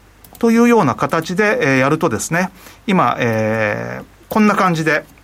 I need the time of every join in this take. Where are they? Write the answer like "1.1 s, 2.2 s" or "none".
none